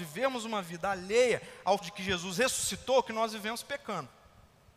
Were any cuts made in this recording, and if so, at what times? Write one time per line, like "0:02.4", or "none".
0:01.8